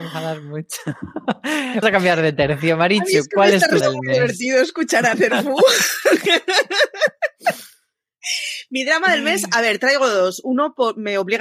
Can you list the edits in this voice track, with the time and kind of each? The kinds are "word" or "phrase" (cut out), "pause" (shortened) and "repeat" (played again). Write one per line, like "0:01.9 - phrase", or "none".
0:01.8 - word
0:03.8 - word
0:05.1 - word